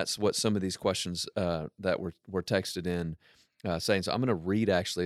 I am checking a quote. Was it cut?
no; 0 cuts

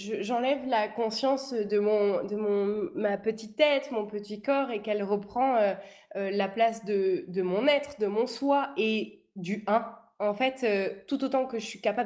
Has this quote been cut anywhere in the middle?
no; 0 cuts

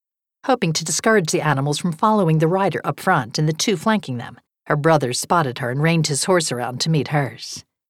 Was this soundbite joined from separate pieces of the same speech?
yes; 1 cut; at 4.5 s

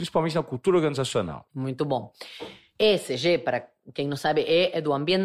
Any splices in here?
no; 0 cuts

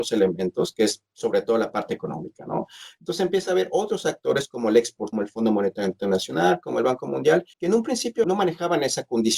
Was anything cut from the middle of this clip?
yes; 3 cuts; at 5.1 s, 7.5 s, 8.2 s

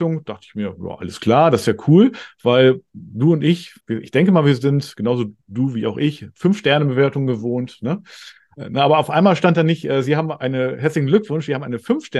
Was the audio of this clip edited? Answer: yes; 1 cut; at 3.8 s

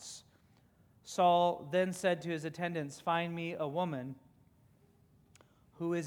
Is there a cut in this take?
no; 0 cuts

